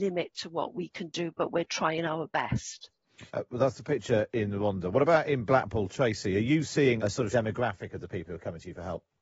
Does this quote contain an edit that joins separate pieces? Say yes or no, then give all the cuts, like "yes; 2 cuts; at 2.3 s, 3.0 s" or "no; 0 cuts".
yes; 3 cuts; at 3.3 s, 7.0 s, 7.3 s